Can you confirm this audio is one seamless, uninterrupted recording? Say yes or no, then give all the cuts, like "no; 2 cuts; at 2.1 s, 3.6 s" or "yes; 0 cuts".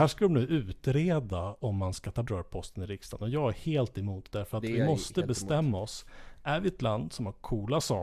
no; 1 cut; at 2.3 s